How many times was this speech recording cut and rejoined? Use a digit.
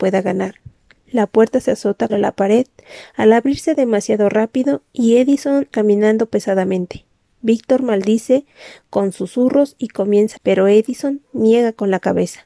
3